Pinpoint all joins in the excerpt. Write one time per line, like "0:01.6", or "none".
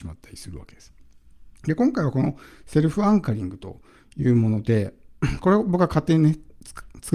0:01.6